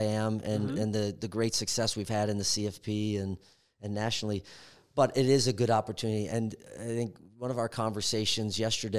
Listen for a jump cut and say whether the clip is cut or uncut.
uncut